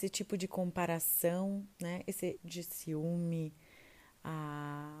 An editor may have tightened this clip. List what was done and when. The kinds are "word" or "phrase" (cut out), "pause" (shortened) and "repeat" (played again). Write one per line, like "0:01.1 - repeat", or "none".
0:02.4 - phrase